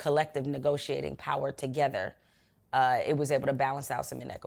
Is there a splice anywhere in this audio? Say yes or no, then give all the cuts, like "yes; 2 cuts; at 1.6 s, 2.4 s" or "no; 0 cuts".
no; 0 cuts